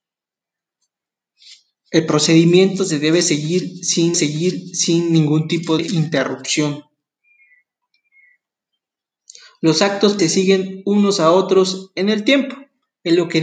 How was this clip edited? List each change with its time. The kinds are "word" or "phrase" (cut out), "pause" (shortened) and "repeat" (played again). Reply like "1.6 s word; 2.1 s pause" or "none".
4.1 s repeat; 5.8 s word; 10.2 s word